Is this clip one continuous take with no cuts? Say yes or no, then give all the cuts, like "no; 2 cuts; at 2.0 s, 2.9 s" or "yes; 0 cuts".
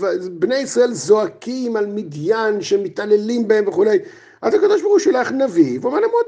yes; 0 cuts